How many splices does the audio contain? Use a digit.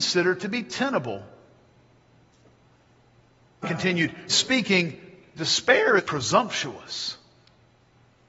3